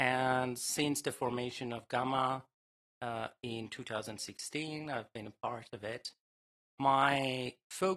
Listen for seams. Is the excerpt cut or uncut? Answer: uncut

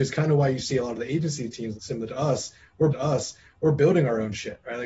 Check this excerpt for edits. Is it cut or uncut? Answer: cut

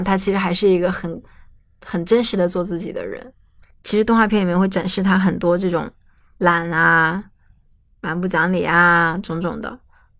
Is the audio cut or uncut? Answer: uncut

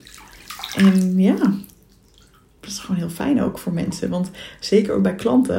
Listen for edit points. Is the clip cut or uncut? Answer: uncut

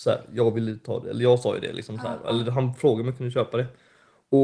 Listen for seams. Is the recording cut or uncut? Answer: uncut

